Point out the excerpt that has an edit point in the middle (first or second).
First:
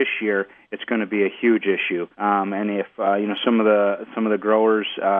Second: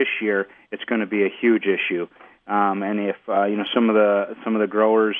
first